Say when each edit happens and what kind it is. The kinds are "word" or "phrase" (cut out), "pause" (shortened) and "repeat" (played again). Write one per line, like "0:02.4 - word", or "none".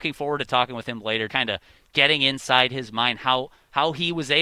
0:01.3 - word